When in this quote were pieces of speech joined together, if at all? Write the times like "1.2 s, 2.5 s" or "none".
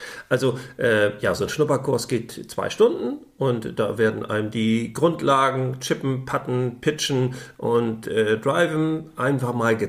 none